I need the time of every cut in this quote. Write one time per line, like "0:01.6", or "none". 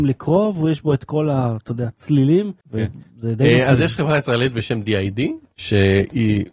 0:02.6